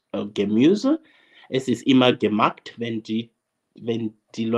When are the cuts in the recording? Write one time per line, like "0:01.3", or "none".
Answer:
none